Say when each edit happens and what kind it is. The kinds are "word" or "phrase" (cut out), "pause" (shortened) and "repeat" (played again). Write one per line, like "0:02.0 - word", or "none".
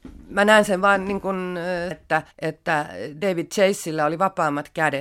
0:01.9 - word
0:02.3 - pause